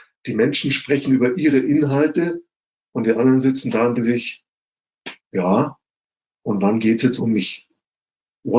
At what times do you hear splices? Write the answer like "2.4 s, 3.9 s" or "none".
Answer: 4.0 s, 7.2 s